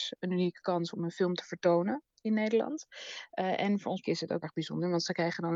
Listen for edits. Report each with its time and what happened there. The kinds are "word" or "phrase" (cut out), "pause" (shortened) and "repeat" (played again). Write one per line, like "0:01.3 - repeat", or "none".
0:04.0 - word
0:04.4 - word